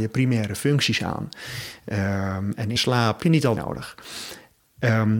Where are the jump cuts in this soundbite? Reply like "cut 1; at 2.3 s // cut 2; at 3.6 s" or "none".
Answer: cut 1; at 2.8 s // cut 2; at 3.2 s // cut 3; at 3.6 s